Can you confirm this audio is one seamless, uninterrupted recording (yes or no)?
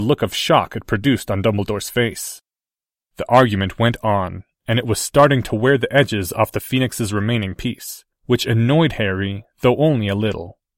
yes